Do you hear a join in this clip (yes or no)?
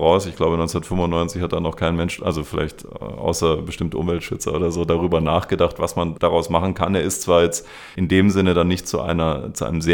no